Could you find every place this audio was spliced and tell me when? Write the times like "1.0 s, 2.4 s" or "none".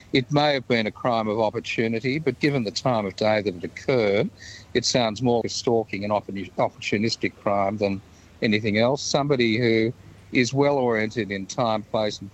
5.4 s